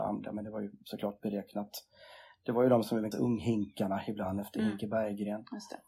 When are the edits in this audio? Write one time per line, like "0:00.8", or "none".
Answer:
0:03.1